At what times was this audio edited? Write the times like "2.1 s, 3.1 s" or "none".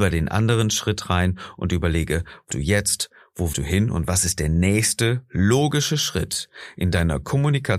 2.5 s, 3.5 s